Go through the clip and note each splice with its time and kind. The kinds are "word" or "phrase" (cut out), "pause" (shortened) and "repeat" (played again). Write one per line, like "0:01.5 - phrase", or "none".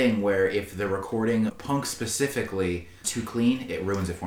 0:01.5 - word
0:03.0 - word